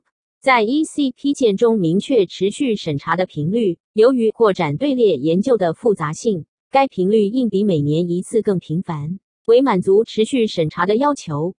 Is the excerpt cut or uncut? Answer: cut